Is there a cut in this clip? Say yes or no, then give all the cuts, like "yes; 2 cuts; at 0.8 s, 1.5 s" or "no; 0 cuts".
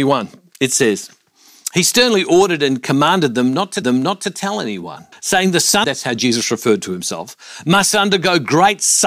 yes; 3 cuts; at 3.8 s, 5.1 s, 5.8 s